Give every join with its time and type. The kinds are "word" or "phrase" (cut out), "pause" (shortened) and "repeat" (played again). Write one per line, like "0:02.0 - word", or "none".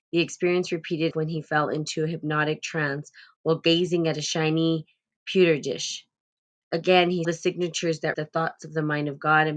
0:01.1 - word
0:07.2 - word
0:08.1 - word